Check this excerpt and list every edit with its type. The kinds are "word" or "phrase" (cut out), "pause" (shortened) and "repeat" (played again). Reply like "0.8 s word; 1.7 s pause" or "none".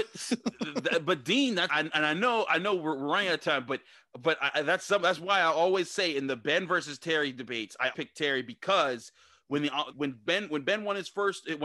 1.7 s word; 7.9 s word; 9.9 s word